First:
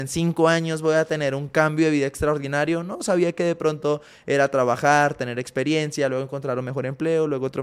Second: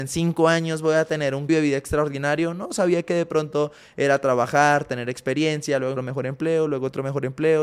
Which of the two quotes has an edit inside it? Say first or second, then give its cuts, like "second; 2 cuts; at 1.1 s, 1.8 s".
second; 2 cuts; at 1.5 s, 6.0 s